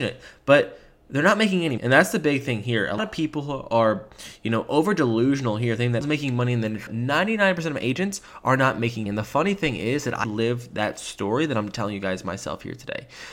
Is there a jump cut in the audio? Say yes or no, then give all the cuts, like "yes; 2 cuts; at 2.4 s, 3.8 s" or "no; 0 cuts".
yes; 6 cuts; at 1.8 s, 3.0 s, 6.0 s, 6.9 s, 9.1 s, 10.2 s